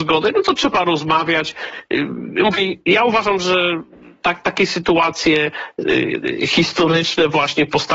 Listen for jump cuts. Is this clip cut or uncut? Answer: uncut